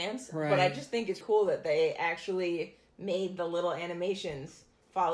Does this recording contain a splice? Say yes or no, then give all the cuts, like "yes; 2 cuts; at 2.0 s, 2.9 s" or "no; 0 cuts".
yes; 1 cut; at 1.2 s